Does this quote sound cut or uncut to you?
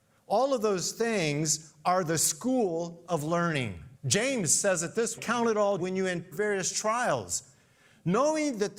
cut